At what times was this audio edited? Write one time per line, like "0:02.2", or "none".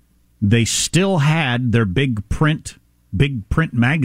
none